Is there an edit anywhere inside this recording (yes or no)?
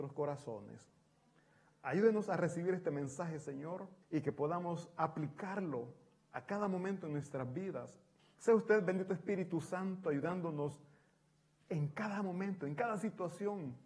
yes